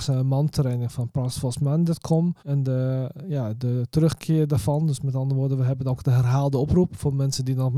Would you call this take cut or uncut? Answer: cut